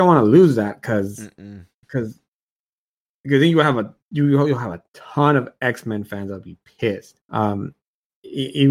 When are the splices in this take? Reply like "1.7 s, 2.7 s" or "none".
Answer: 7.2 s